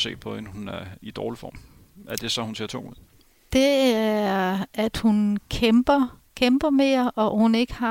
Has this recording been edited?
no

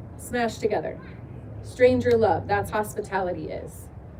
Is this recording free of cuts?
no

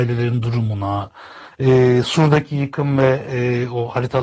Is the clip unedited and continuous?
yes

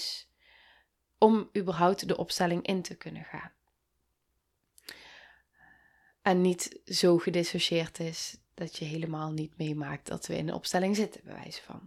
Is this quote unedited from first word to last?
yes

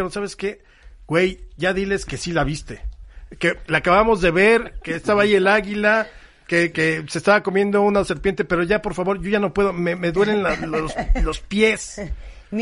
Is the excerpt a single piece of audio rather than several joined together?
yes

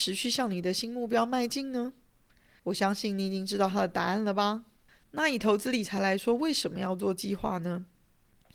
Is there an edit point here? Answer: yes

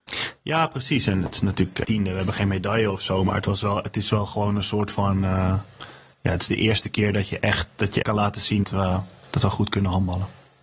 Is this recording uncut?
no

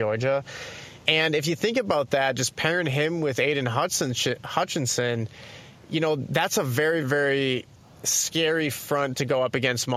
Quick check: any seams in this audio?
yes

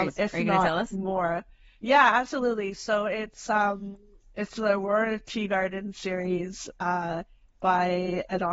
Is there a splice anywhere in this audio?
no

